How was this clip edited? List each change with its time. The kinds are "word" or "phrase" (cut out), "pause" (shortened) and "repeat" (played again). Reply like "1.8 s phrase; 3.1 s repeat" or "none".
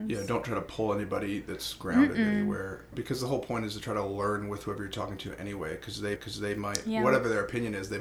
2.9 s word; 6.2 s repeat